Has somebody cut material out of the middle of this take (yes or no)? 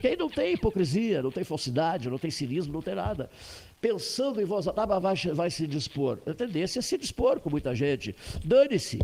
no